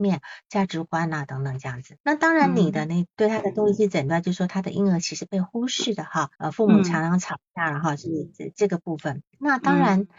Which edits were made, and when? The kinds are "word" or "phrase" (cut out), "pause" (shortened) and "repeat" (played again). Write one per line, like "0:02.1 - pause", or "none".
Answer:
0:02.0 - pause
0:03.1 - word
0:06.4 - pause
0:09.3 - pause